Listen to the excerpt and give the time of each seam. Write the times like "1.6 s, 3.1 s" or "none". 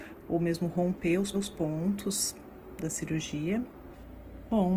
1.3 s